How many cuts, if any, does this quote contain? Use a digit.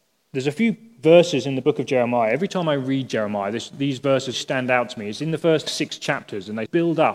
2